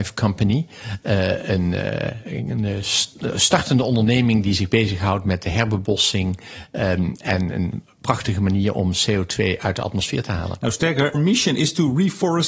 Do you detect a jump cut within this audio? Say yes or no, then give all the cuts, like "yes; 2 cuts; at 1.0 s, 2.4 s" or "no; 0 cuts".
yes; 1 cut; at 11.1 s